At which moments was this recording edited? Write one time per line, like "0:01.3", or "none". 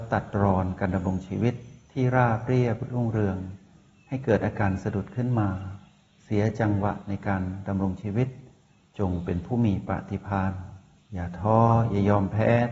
none

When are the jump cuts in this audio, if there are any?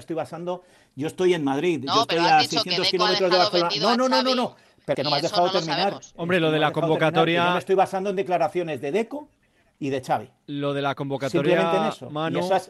0:04.9

